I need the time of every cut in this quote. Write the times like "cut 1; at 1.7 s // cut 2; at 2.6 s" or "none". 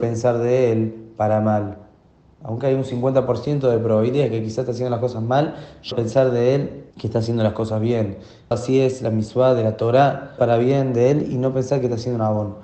cut 1; at 5.9 s // cut 2; at 6.9 s // cut 3; at 8.5 s // cut 4; at 10.4 s